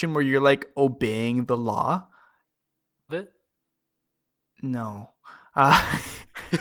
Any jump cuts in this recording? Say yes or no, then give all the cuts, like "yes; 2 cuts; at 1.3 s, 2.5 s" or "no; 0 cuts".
yes; 1 cut; at 3.1 s